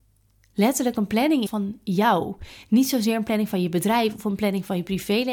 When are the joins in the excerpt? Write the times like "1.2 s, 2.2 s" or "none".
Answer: 1.5 s